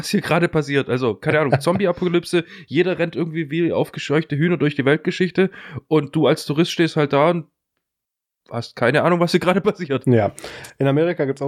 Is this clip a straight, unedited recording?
yes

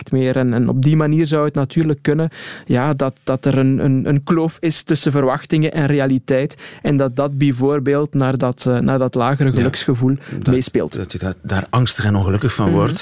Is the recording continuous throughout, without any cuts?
yes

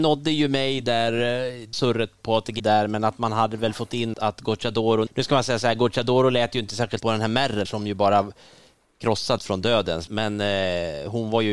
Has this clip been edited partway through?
yes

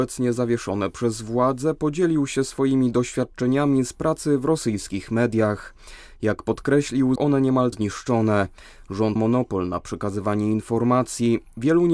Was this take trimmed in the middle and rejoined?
yes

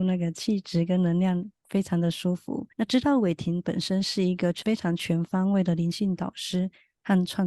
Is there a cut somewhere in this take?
yes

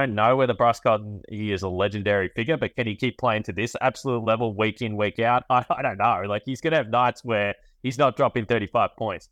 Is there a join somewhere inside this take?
no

